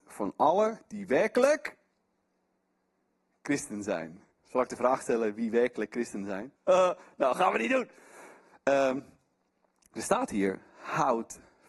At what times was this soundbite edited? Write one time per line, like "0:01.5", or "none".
0:04.3
0:06.6